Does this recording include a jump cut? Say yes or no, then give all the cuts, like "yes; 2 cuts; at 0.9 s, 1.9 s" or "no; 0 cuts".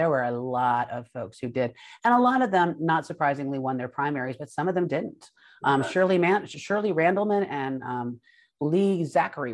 no; 0 cuts